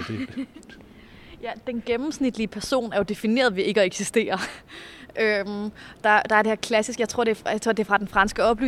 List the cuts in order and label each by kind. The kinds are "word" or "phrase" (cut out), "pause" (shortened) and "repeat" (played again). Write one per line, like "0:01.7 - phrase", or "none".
none